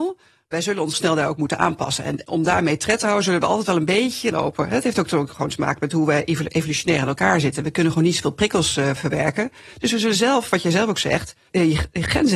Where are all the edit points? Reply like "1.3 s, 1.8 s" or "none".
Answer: 0.9 s, 4.3 s